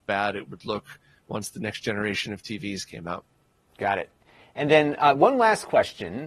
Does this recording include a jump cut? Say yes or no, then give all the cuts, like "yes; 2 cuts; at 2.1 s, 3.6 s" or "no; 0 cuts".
no; 0 cuts